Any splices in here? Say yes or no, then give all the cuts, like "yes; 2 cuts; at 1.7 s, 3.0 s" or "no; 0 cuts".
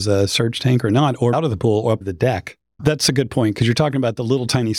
yes; 2 cuts; at 1.3 s, 2.0 s